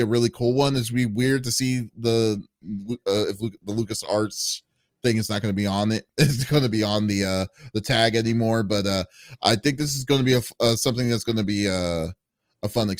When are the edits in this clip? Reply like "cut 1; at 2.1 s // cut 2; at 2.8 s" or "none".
none